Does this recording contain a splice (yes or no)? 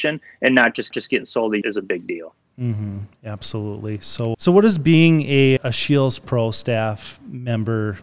yes